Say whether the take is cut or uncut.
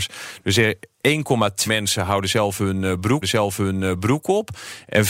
cut